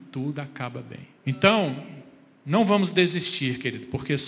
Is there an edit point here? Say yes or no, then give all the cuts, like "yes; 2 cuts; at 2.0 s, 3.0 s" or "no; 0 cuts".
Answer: yes; 1 cut; at 1.2 s